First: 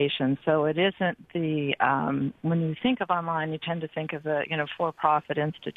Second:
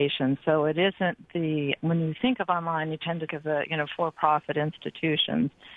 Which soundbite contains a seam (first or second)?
second